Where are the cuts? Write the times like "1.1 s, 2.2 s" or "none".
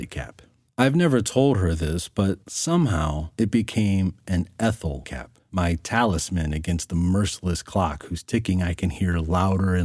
2.4 s, 5.0 s